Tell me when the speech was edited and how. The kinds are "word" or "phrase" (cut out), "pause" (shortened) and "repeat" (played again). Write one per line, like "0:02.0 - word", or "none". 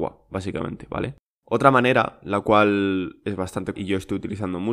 0:01.2 - pause
0:03.7 - word